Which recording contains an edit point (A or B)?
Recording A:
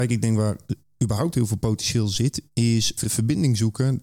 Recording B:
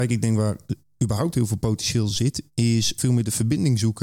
A